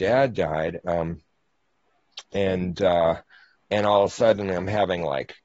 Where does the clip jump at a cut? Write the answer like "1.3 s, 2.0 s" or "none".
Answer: 3.5 s